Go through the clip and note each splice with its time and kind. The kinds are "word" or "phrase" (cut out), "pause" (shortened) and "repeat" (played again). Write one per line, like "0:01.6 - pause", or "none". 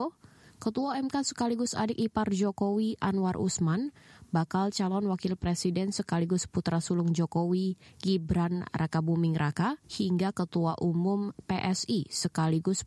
0:09.8 - pause